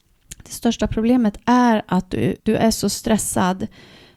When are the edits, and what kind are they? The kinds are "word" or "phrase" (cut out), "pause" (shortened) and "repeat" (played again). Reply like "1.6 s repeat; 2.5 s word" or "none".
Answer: 2.4 s pause